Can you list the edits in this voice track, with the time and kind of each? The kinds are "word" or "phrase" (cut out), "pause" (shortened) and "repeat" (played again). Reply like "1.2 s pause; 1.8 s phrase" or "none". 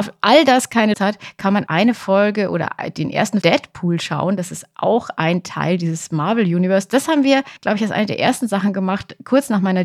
0.9 s word; 1.7 s word; 3.4 s phrase; 7.6 s pause